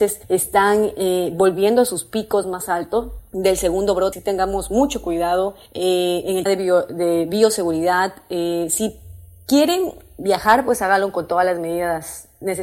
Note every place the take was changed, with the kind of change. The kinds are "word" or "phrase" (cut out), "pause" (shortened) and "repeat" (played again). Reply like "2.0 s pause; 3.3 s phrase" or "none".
4.1 s word; 6.5 s word